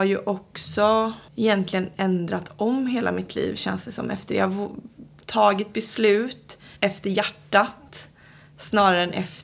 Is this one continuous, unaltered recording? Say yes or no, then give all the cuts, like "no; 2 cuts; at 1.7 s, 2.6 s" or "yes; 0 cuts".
no; 2 cuts; at 1.3 s, 6.8 s